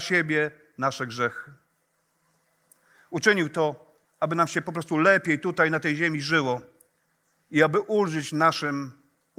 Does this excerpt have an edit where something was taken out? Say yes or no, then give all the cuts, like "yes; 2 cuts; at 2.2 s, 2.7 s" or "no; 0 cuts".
no; 0 cuts